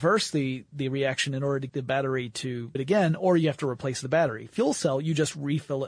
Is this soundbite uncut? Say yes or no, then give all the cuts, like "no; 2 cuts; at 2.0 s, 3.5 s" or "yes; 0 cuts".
no; 2 cuts; at 1.7 s, 2.7 s